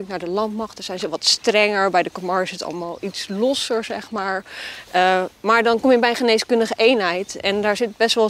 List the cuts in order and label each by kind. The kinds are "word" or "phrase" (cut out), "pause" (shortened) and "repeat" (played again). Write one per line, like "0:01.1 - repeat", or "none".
none

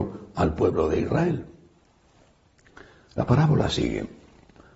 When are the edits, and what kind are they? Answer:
none

